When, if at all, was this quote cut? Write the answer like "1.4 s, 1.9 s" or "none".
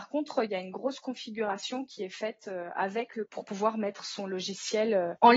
3.3 s